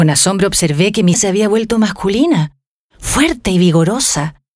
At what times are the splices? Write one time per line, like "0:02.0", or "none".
0:01.1